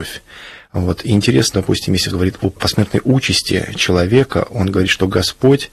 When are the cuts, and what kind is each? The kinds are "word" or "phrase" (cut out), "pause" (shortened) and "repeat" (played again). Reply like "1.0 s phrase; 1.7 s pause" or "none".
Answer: 1.5 s word; 2.1 s phrase